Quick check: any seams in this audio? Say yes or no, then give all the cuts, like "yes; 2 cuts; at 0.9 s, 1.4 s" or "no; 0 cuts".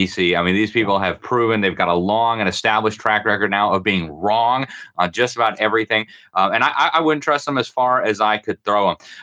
no; 0 cuts